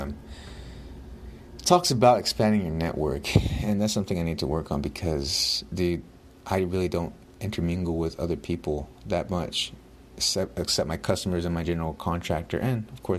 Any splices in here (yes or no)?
no